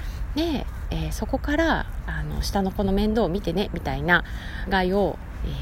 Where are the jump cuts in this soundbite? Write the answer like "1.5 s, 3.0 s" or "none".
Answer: 4.7 s

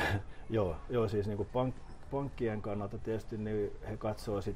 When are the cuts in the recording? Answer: 1.5 s

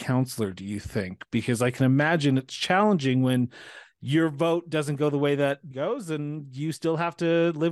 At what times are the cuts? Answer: 5.7 s

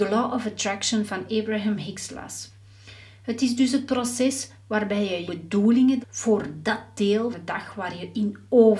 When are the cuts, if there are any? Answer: 5.3 s, 6.0 s, 7.3 s

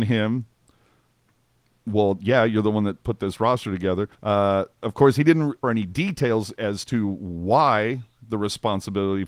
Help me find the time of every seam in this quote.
4.1 s, 5.6 s

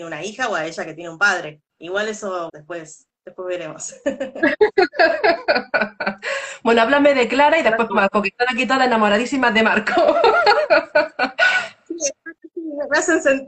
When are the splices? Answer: 1.7 s, 2.5 s, 7.9 s

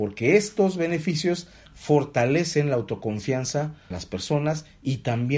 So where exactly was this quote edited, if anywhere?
1.7 s, 3.9 s

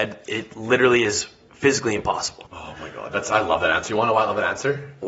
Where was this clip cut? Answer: 2.5 s

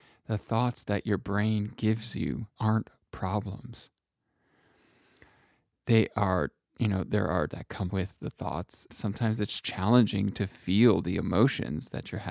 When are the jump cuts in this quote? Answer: 2.6 s, 7.5 s, 7.9 s, 8.9 s

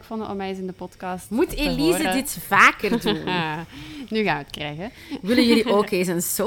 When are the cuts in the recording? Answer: none

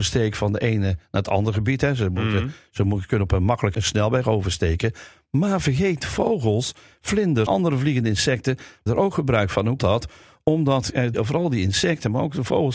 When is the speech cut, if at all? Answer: 3.7 s, 6.0 s, 7.5 s, 8.9 s, 9.8 s, 11.1 s

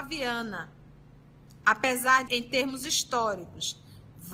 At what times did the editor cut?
2.3 s

